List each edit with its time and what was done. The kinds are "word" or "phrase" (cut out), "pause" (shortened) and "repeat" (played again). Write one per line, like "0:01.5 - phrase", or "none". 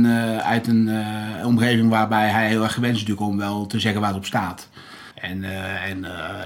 0:05.1 - pause